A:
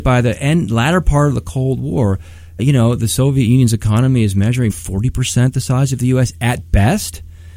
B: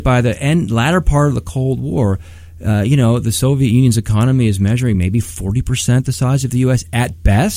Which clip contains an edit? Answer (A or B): A